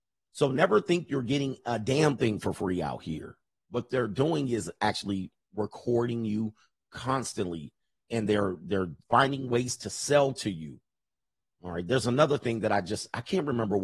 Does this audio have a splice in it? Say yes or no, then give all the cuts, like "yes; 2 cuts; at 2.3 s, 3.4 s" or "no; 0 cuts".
no; 0 cuts